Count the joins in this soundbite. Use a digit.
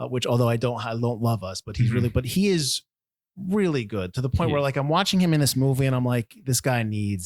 0